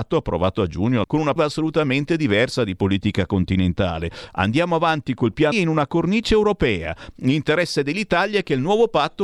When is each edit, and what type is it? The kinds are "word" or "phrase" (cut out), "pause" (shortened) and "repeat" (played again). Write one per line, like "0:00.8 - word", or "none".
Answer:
0:01.0 - word
0:01.4 - word
0:05.5 - word